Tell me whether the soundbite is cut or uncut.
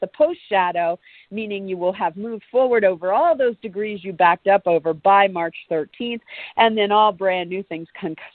uncut